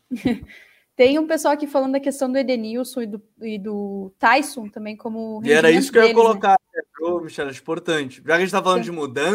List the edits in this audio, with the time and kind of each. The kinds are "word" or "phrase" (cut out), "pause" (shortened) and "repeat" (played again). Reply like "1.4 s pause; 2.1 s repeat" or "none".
none